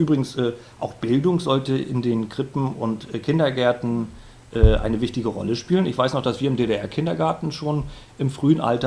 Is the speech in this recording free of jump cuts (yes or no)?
yes